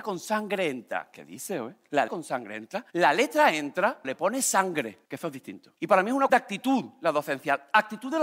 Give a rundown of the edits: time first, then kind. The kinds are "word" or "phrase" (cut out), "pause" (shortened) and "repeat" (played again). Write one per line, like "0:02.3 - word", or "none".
0:02.1 - word
0:02.9 - pause
0:04.0 - word
0:05.0 - pause
0:05.8 - pause
0:06.3 - word